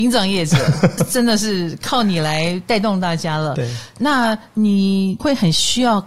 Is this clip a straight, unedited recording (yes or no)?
no